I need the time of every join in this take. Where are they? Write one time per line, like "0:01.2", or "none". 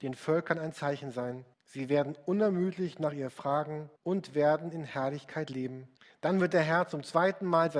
0:01.5
0:04.0
0:06.0